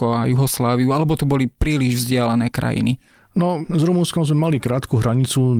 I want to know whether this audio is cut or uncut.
uncut